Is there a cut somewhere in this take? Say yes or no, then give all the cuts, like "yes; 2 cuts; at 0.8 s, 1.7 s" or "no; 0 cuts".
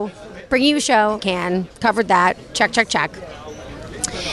yes; 1 cut; at 1.2 s